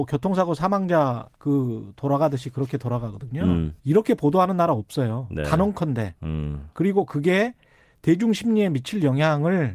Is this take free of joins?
no; 2 cuts; at 1.3 s, 3.8 s

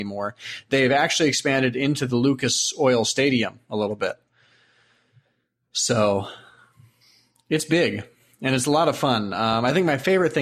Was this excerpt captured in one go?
yes; 0 cuts

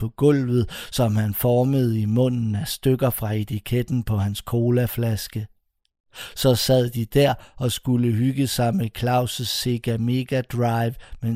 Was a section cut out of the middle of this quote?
no; 0 cuts

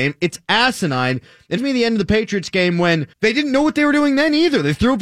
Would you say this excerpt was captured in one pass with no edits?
no; 2 cuts; at 1.6 s, 3.1 s

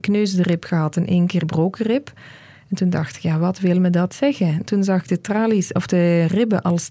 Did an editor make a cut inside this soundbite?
yes; 1 cut; at 1.4 s

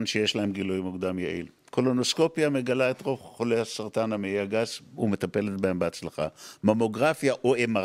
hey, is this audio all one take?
yes; 0 cuts

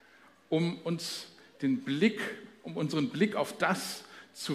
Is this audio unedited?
yes; 0 cuts

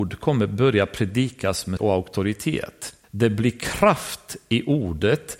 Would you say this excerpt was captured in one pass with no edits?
no; 2 cuts; at 1.8 s, 3.0 s

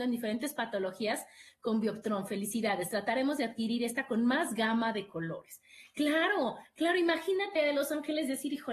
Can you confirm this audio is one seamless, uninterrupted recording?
no; 1 cut; at 7.6 s

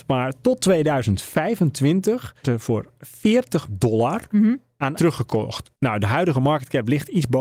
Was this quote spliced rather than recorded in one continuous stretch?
yes; 4 cuts; at 2.4 s, 3.7 s, 5.0 s, 5.7 s

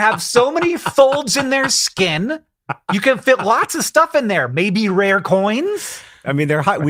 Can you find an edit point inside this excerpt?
no; 0 cuts

